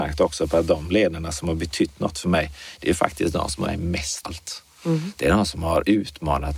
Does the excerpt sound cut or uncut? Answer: cut